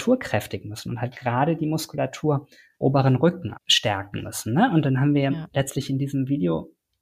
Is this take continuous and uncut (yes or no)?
no